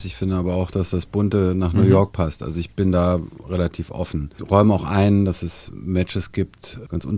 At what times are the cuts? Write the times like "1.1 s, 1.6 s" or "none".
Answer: none